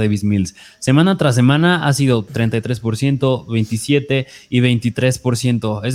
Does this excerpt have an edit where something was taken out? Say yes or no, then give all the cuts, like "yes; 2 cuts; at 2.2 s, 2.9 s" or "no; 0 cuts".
no; 0 cuts